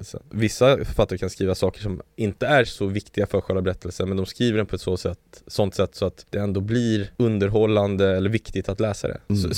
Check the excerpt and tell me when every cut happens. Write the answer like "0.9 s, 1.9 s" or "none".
none